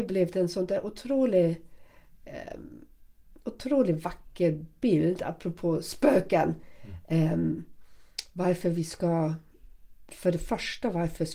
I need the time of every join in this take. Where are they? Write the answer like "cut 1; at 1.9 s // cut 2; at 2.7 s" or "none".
none